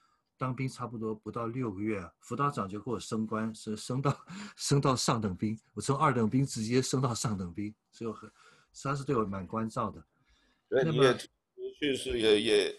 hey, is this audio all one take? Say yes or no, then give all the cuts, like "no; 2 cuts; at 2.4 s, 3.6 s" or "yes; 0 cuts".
no; 1 cut; at 2.1 s